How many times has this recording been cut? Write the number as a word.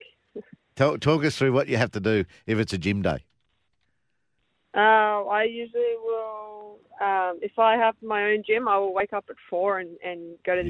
zero